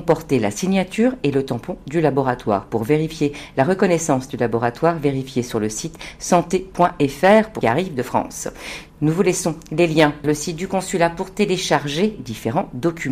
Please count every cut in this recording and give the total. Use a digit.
3